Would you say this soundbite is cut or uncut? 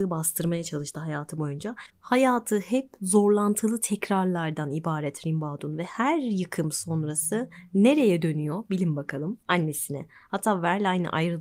cut